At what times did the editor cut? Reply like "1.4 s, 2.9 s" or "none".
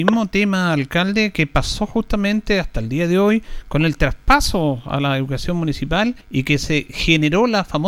6.2 s